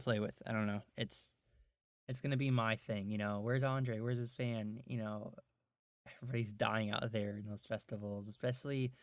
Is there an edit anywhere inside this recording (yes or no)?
no